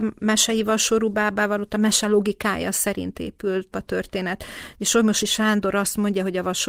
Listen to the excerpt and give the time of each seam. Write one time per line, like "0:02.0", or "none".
0:03.7